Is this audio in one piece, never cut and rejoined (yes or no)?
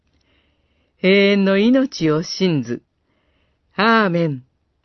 yes